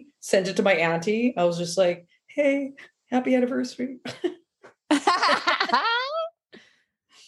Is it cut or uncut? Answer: uncut